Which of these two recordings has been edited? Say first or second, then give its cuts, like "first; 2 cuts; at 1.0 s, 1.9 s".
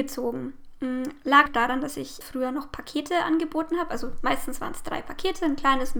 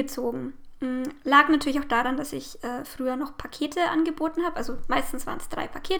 first; 2 cuts; at 1.5 s, 2.2 s